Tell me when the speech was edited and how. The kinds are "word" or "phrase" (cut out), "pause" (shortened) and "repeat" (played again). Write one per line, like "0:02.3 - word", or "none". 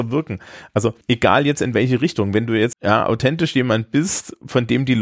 0:01.0 - pause
0:02.7 - word